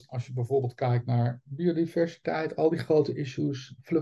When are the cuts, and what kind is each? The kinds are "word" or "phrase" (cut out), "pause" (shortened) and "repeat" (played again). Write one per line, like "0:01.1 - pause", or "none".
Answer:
none